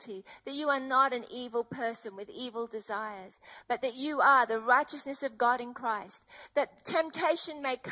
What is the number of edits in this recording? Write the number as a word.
zero